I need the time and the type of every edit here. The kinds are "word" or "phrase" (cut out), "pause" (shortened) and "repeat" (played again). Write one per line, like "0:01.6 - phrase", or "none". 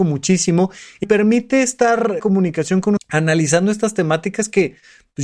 0:01.0 - word
0:02.2 - word
0:03.0 - word